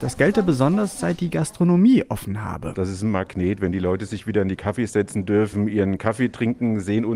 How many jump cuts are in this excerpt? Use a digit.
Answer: 0